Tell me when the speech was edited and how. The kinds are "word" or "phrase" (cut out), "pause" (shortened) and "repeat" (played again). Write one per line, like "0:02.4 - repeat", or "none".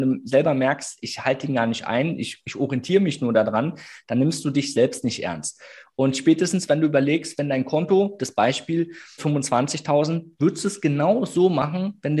0:09.2 - phrase